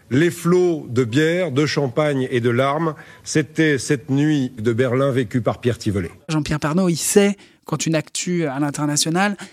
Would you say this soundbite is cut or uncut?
cut